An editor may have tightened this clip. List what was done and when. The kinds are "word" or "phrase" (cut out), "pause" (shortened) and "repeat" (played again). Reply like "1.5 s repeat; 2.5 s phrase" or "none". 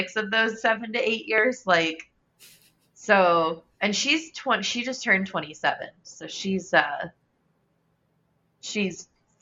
none